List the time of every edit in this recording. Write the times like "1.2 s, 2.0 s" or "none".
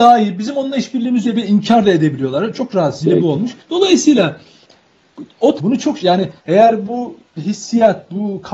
1.2 s, 3.0 s, 3.6 s, 5.6 s, 6.0 s, 6.4 s, 7.4 s